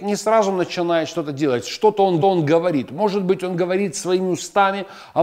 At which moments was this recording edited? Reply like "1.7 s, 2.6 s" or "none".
2.2 s